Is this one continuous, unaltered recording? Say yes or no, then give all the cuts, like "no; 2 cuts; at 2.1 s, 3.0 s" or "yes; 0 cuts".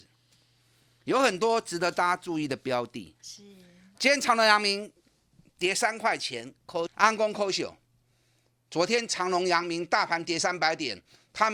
no; 1 cut; at 6.9 s